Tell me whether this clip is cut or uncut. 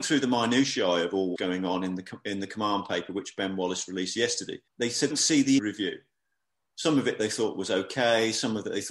cut